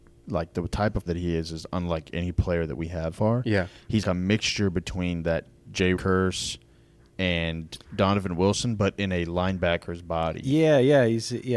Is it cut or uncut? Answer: cut